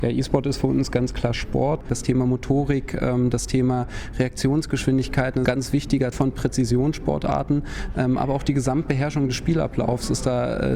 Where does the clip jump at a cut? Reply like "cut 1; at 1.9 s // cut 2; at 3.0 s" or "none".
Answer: cut 1; at 5.4 s // cut 2; at 6.1 s